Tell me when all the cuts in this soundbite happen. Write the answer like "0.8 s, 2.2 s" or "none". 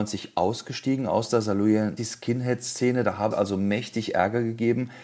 2.0 s, 3.3 s